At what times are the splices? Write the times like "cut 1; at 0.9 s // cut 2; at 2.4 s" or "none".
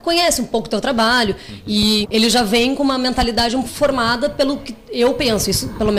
cut 1; at 2.0 s // cut 2; at 3.6 s